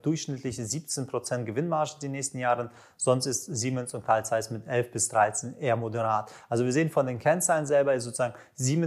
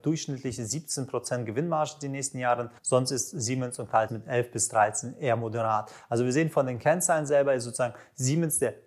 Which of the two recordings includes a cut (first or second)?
second